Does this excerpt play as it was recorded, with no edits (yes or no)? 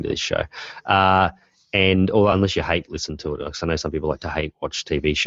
yes